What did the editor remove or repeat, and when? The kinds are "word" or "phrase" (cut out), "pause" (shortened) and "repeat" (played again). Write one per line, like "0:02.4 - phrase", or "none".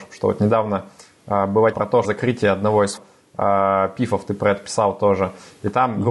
0:01.7 - word
0:02.0 - phrase
0:03.0 - word